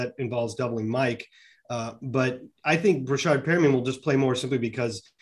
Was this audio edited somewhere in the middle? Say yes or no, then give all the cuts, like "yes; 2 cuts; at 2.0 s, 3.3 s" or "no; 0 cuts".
no; 0 cuts